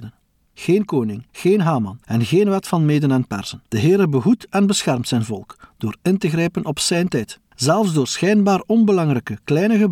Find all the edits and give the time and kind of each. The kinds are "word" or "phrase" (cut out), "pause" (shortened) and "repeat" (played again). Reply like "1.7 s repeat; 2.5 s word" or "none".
1.3 s pause; 3.7 s pause; 7.5 s pause